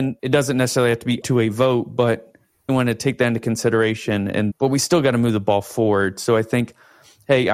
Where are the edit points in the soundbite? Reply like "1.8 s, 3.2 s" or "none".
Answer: 1.2 s, 2.7 s, 4.5 s